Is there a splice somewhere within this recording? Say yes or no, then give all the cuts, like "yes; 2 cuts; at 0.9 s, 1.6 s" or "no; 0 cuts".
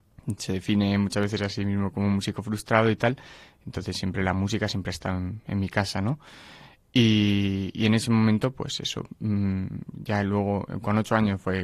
no; 0 cuts